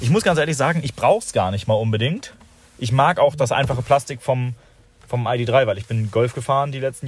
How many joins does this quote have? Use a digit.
0